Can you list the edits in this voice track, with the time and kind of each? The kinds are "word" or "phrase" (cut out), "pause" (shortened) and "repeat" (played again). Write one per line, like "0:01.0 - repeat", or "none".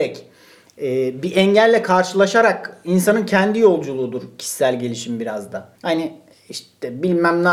0:05.7 - pause